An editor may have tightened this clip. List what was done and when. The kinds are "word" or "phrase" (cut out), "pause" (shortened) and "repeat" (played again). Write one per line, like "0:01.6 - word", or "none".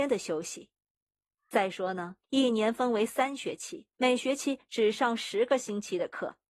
0:02.2 - pause
0:03.9 - pause